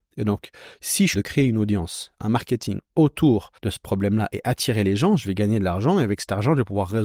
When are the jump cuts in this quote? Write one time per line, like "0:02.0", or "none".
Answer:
0:01.1
0:03.6